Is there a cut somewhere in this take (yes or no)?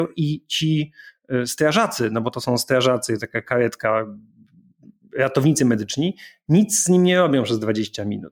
no